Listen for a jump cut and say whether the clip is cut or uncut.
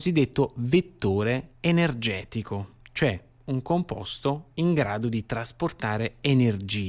cut